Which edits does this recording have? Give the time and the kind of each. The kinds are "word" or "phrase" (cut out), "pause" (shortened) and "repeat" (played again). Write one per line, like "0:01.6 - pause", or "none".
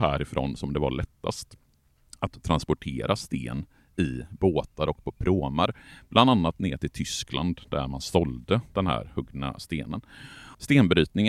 none